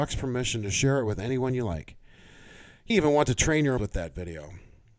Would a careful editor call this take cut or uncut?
cut